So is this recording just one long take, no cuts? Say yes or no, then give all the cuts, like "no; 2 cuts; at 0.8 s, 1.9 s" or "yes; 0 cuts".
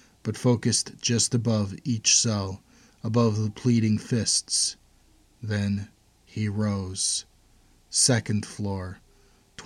yes; 0 cuts